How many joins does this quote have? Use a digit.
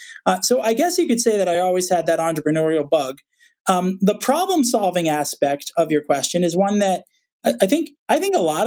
0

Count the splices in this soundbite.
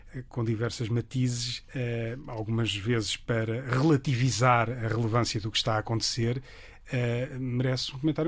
1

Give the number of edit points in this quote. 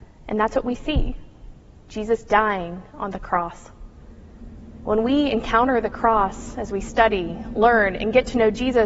0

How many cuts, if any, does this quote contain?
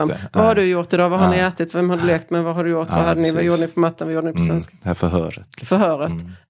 0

